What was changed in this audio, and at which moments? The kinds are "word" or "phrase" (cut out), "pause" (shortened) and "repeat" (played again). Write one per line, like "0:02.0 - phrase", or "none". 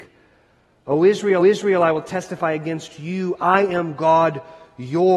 0:01.4 - repeat